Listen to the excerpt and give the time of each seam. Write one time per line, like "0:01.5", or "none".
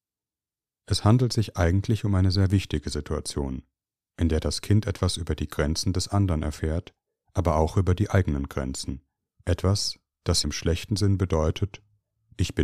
0:09.2
0:10.4